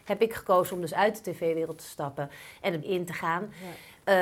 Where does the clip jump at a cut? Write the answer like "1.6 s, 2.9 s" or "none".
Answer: 2.8 s